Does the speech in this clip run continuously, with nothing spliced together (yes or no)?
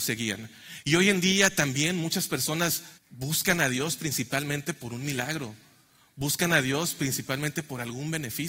no